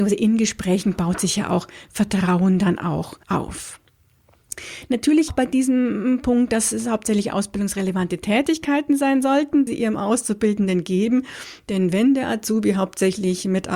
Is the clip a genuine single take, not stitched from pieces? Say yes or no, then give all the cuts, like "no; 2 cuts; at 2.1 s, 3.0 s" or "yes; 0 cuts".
no; 3 cuts; at 3.2 s, 5.3 s, 9.7 s